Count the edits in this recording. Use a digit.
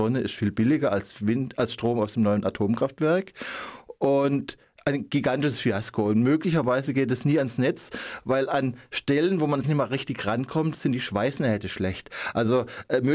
1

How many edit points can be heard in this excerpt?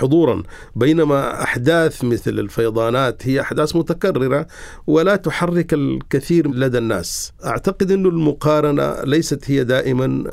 0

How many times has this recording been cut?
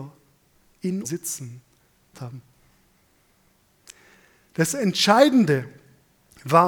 2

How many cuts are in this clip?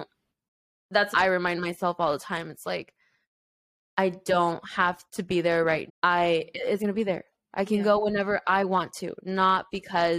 4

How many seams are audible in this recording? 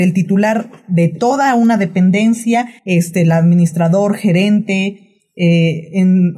1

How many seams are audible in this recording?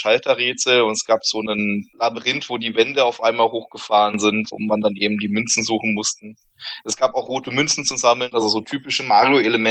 0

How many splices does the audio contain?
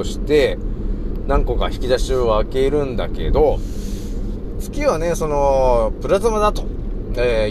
0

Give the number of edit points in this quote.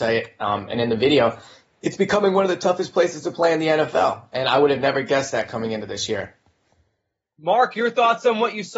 0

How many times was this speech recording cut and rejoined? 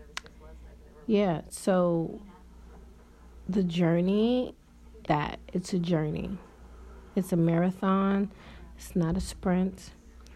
2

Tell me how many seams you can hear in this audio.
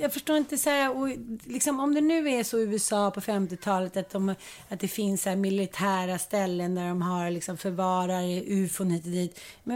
0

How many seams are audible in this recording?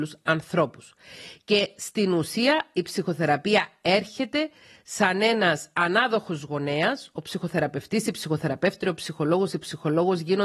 0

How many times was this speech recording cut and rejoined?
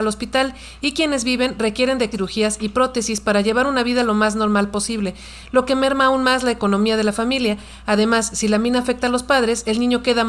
1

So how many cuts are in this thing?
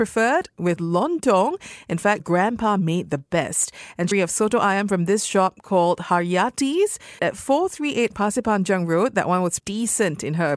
4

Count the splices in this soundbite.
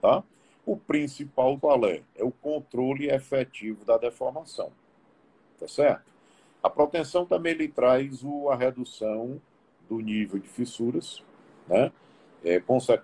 1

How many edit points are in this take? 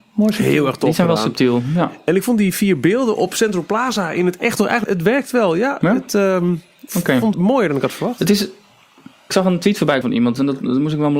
5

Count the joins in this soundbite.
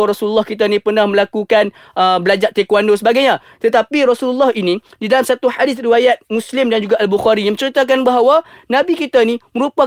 0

